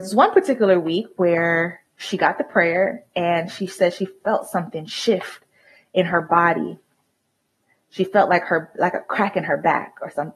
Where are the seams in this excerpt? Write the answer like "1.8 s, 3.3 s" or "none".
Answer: none